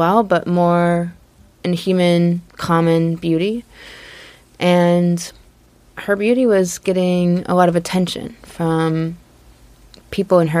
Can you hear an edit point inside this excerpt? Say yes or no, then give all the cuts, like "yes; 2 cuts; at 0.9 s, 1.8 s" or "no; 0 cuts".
yes; 1 cut; at 5.5 s